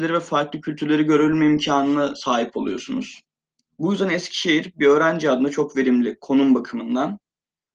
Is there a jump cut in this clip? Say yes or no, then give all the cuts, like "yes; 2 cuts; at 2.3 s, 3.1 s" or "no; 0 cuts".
no; 0 cuts